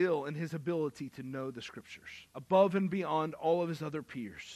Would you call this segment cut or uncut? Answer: cut